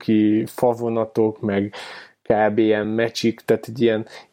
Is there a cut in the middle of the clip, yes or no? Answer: no